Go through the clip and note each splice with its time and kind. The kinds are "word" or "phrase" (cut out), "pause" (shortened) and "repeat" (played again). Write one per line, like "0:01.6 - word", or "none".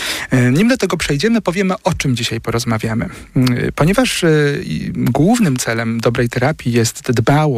none